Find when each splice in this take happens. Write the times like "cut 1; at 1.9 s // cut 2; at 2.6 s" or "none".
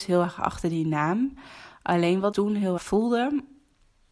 cut 1; at 2.3 s // cut 2; at 2.8 s